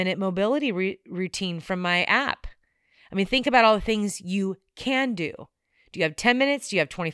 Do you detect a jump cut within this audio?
no; 0 cuts

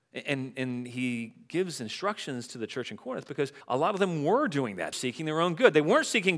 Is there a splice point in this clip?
yes; 2 cuts; at 3.6 s, 4.9 s

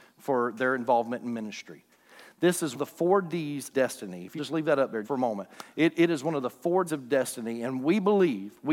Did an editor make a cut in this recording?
yes; 5 cuts; at 2.7 s, 3.7 s, 4.4 s, 5.0 s, 6.9 s

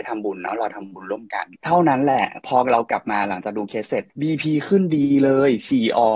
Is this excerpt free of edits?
no; 2 cuts; at 1.6 s, 4.1 s

